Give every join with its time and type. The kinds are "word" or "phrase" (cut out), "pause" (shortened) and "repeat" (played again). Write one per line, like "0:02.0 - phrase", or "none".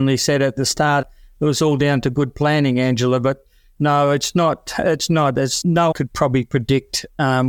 0:01.0 - word
0:05.6 - word
0:05.9 - word